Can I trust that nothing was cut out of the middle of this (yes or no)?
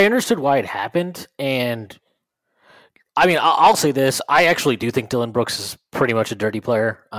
yes